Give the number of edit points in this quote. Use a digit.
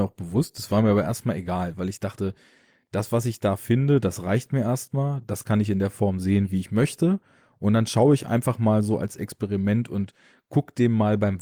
0